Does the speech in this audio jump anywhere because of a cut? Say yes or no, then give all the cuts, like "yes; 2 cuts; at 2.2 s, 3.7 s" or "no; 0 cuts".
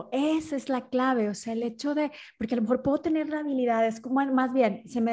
no; 0 cuts